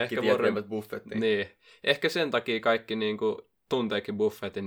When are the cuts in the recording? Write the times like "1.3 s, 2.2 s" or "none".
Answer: none